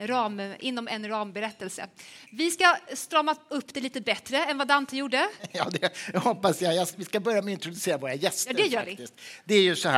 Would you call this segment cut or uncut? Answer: uncut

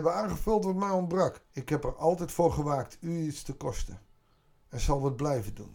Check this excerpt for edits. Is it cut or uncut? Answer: cut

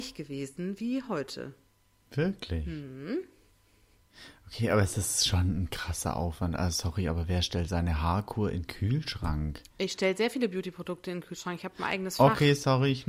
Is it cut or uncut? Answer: uncut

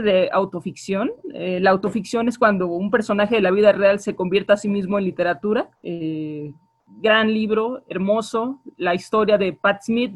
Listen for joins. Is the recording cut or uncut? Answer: cut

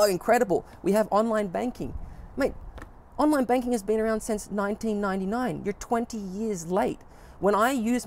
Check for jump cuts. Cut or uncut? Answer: uncut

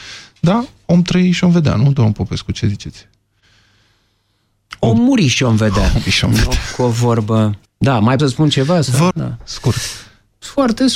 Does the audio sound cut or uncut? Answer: cut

